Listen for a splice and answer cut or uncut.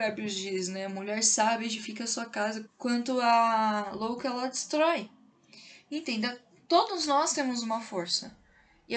cut